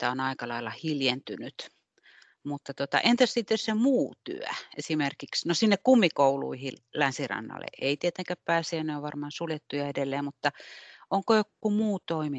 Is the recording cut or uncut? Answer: uncut